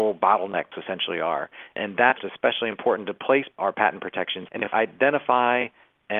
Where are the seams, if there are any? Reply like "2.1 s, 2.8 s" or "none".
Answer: 2.2 s, 4.7 s